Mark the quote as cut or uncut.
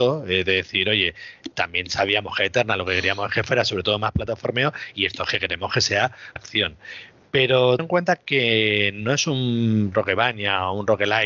cut